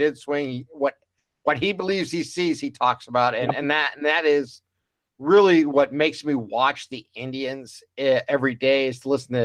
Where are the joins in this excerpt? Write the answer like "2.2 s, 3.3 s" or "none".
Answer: none

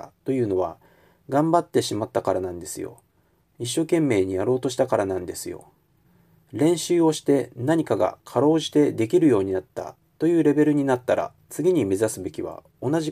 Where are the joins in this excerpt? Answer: none

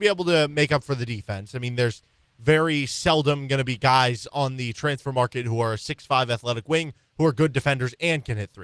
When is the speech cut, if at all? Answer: none

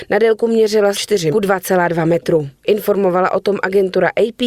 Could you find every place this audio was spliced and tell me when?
0.9 s, 1.3 s

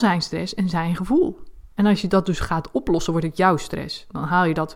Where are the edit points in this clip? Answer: 1.7 s

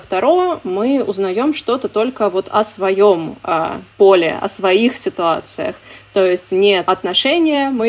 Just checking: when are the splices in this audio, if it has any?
3.9 s, 6.8 s

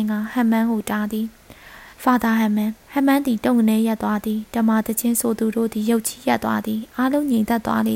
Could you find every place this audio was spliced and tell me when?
1.9 s, 2.8 s

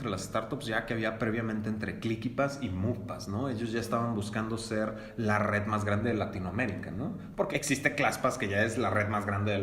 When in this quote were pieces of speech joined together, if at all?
none

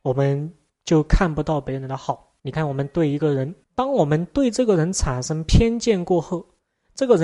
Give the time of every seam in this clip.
2.4 s, 3.6 s

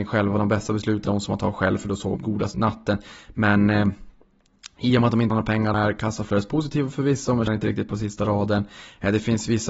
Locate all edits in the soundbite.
1.0 s, 2.2 s, 2.5 s, 5.3 s, 5.7 s, 7.5 s, 7.9 s

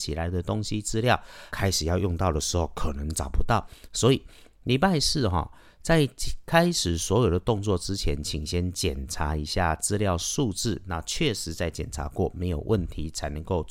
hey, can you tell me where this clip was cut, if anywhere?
1.5 s

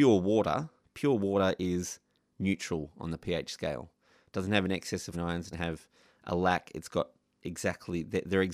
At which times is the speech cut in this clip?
5.1 s, 5.5 s

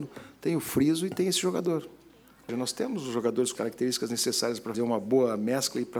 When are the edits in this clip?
2.5 s, 3.5 s, 4.7 s

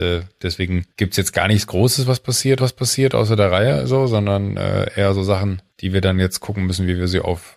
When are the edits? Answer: 0.9 s, 2.6 s, 5.7 s

